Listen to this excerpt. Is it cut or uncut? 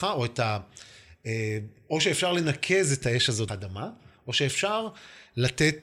cut